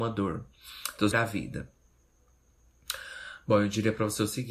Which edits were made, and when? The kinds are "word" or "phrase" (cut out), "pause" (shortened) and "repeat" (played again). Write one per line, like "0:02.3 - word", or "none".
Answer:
0:01.1 - phrase